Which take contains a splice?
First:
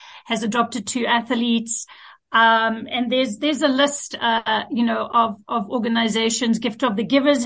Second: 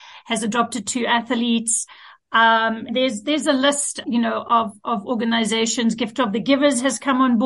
second; 2 cuts; at 2.9 s, 4.0 s

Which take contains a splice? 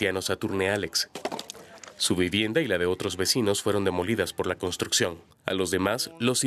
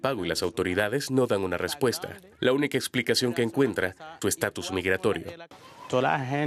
second; 1 cut; at 4.2 s

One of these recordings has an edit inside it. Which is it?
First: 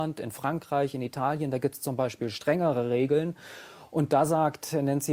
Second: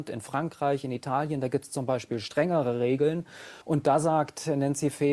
second; 1 cut; at 3.6 s

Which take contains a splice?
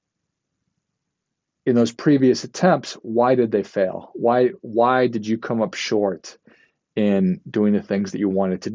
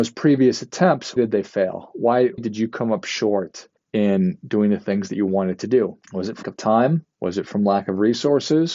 second; 6 cuts; at 1.2 s, 2.4 s, 3.8 s, 6.0 s, 6.4 s, 7.1 s

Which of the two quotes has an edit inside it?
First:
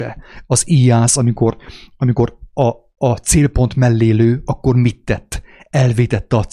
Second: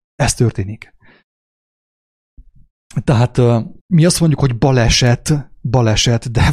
second; 1 cut; at 3.8 s

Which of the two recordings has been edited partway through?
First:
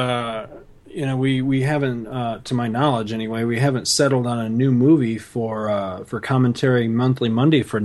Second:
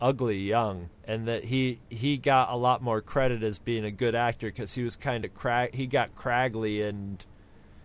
second; 2 cuts; at 1.0 s, 1.8 s

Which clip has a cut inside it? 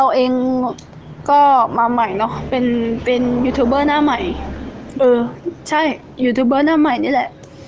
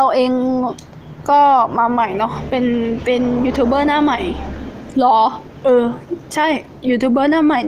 first; 1 cut; at 4.9 s

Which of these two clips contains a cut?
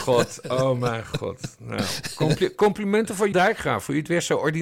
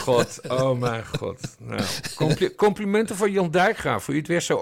first; 1 cut; at 3.3 s

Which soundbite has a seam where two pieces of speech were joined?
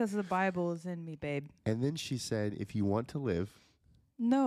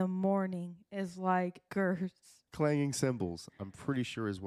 second; 2 cuts; at 1.7 s, 2.5 s

